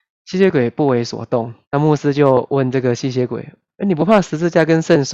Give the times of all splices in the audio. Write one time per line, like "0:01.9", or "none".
0:01.6